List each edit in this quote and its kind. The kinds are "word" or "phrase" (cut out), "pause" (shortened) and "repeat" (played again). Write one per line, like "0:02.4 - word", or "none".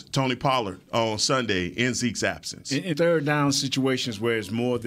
0:02.9 - word